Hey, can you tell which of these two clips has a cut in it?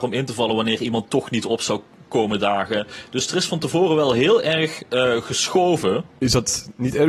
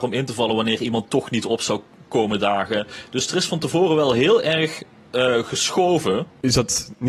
first; 1 cut; at 4.9 s

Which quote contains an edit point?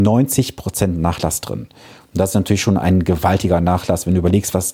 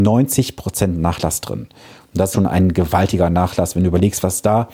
second; 1 cut; at 2.3 s

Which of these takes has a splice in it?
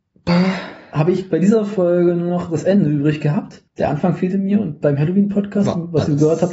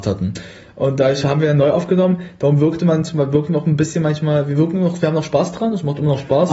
first; 1 cut; at 3.7 s

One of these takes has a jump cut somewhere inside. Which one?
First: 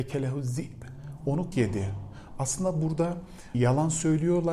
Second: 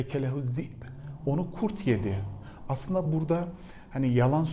first; 2 cuts; at 1.5 s, 3.5 s

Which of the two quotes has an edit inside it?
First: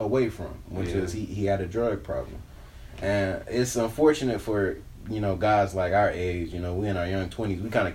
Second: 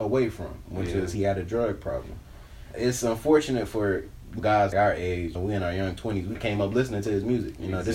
second; 6 cuts; at 1.2 s, 2.7 s, 4.4 s, 4.7 s, 5.4 s, 6.4 s

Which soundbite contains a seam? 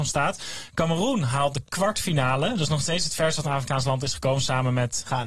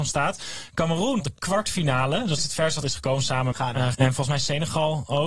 second; 5 cuts; at 1.2 s, 2.4 s, 2.8 s, 3.5 s, 3.9 s

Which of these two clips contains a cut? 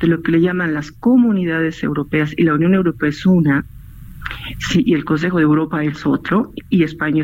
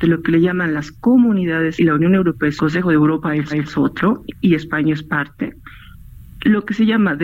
second; 3 cuts; at 1.8 s, 2.6 s, 3.5 s

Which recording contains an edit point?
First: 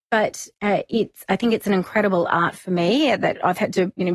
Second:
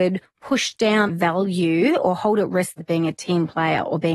second; 2 cuts; at 1.1 s, 2.8 s

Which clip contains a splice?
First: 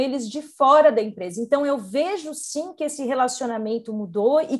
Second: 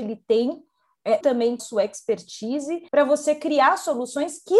second; 3 cuts; at 1.2 s, 1.6 s, 2.9 s

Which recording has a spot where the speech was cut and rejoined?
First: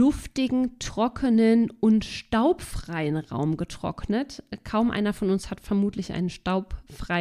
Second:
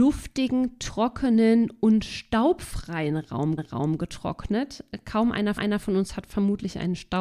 second; 2 cuts; at 3.6 s, 5.6 s

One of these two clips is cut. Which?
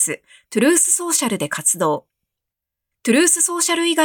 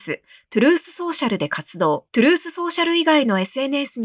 second; 1 cut; at 2.1 s

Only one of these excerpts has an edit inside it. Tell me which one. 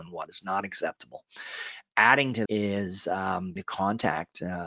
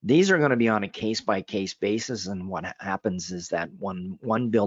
first; 2 cuts; at 2.5 s, 3.6 s

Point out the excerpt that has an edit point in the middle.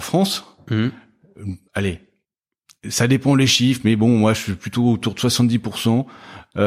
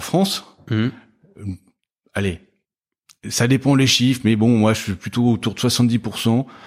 first; 1 cut; at 1.7 s

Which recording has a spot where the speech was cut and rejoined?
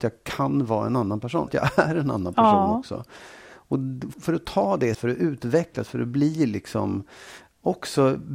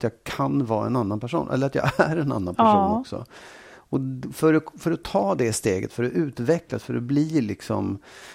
first; 3 cuts; at 1.5 s, 4.1 s, 4.9 s

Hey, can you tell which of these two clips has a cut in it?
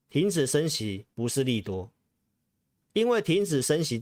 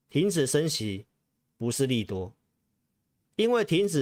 first; 1 cut; at 1.1 s

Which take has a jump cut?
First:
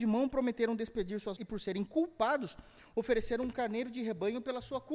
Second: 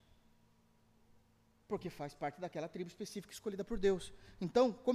first; 1 cut; at 1.4 s

